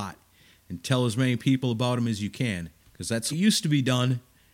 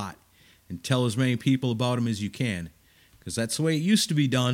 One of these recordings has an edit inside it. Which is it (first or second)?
first